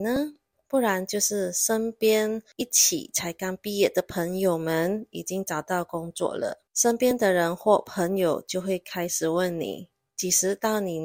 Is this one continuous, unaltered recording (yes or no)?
no